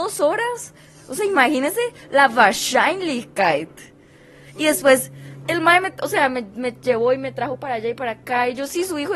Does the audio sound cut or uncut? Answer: uncut